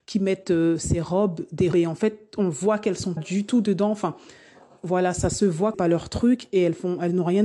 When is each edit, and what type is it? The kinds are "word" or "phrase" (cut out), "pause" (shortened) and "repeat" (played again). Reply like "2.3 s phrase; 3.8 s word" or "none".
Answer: 1.7 s word; 3.2 s word; 5.7 s word